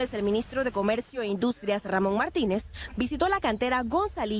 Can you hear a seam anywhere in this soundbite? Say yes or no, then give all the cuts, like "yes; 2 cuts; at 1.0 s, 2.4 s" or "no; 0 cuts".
no; 0 cuts